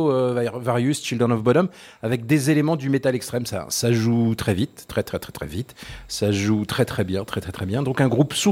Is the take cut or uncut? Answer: uncut